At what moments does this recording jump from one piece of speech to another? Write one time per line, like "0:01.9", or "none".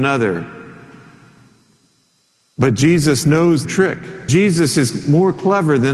0:03.6
0:04.3